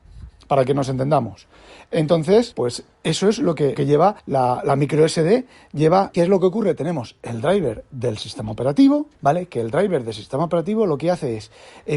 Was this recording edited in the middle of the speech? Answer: yes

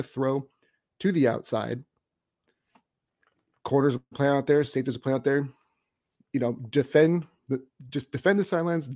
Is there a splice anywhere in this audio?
no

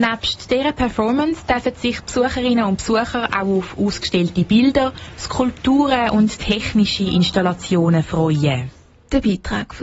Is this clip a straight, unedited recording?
yes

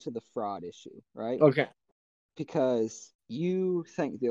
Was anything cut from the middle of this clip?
yes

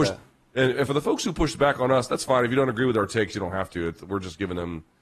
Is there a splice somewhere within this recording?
no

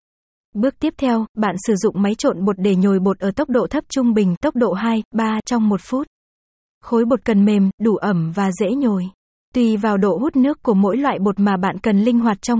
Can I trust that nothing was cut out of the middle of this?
yes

